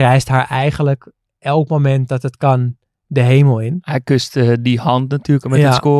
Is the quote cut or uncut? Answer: uncut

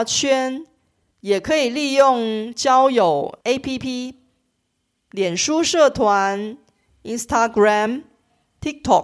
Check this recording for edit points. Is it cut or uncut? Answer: cut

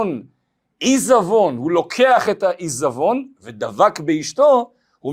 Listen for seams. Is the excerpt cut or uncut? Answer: uncut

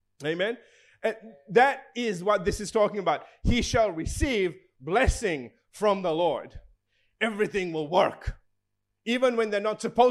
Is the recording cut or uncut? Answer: uncut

